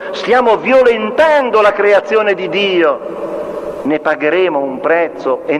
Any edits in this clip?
no; 0 cuts

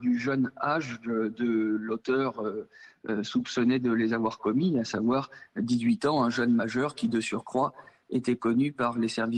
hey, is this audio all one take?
yes; 0 cuts

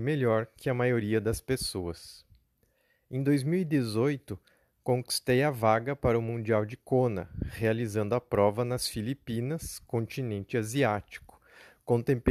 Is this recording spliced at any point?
no; 0 cuts

